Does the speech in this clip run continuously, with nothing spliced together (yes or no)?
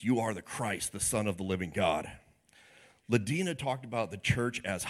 yes